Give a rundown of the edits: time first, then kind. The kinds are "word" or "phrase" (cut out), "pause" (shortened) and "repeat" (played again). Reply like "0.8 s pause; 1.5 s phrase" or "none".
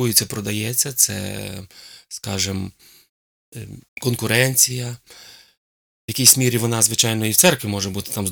3.9 s pause